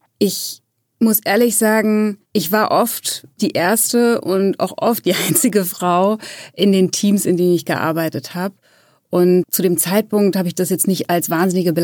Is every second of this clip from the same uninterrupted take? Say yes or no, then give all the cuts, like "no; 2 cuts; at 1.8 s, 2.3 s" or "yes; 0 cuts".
no; 2 cuts; at 2.2 s, 3.4 s